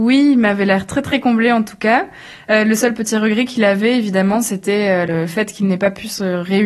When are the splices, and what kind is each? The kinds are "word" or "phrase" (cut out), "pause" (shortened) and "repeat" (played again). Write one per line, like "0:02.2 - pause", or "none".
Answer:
none